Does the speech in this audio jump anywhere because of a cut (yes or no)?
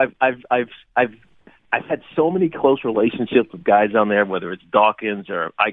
no